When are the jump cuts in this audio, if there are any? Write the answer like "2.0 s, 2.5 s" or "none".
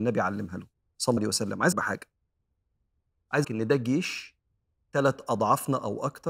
1.2 s, 1.7 s, 3.4 s